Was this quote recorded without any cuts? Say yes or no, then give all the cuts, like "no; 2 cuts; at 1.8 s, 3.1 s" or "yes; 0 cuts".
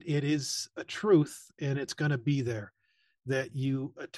yes; 0 cuts